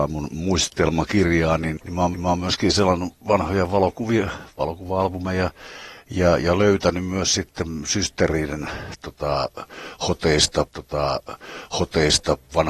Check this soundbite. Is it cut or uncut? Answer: cut